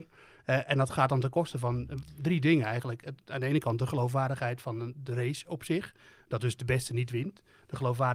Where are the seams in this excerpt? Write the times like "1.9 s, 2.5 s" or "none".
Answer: none